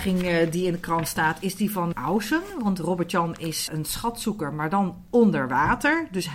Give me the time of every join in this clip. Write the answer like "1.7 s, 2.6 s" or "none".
1.9 s, 3.7 s

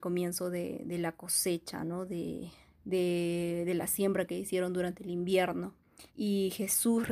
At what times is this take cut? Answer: 2.7 s, 6.1 s

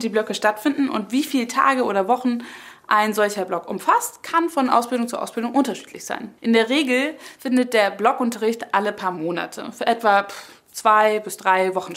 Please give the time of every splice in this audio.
6.4 s

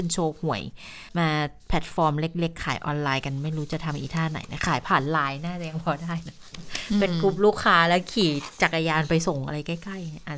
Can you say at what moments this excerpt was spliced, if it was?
1.1 s

